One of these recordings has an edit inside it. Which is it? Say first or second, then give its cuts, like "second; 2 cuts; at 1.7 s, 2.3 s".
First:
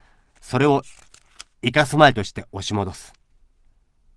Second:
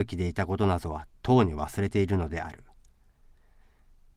first; 1 cut; at 1.5 s